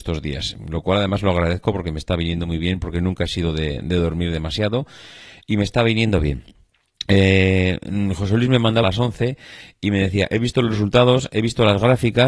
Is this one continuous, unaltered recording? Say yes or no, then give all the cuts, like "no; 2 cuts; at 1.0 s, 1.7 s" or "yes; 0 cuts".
no; 1 cut; at 8.8 s